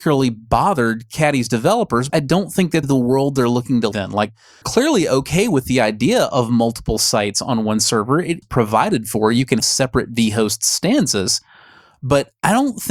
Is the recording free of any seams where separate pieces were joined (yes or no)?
no